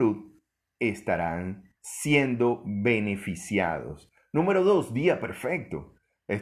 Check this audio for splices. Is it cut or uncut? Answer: cut